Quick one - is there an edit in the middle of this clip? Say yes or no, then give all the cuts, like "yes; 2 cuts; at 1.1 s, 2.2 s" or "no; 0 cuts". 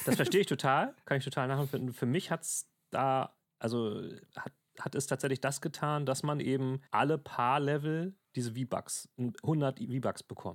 yes; 1 cut; at 6.9 s